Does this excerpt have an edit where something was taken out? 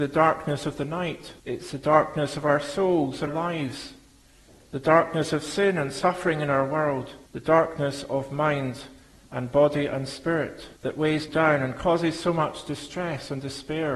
yes; 5 cuts; at 1.4 s, 3.3 s, 7.3 s, 10.8 s, 11.3 s

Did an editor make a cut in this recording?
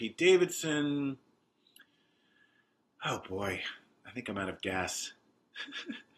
no; 0 cuts

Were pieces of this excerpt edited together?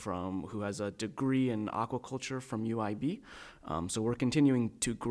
no; 0 cuts

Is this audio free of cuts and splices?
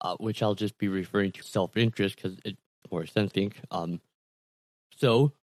no; 3 cuts; at 1.4 s, 2.8 s, 3.3 s

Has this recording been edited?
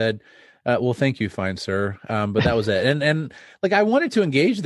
no; 0 cuts

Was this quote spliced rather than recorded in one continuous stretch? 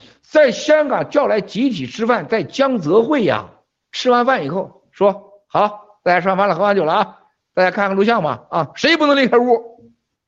no; 0 cuts

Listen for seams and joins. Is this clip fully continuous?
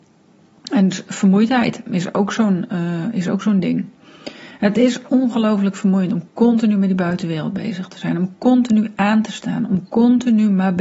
yes; 0 cuts

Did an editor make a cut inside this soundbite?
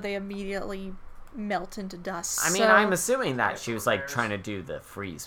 no; 0 cuts

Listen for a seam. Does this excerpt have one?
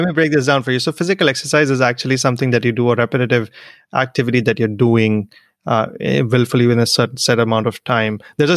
no; 0 cuts

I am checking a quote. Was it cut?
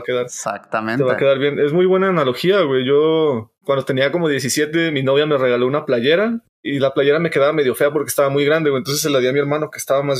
no; 0 cuts

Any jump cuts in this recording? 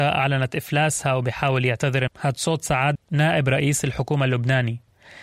yes; 2 cuts; at 2.1 s, 3.0 s

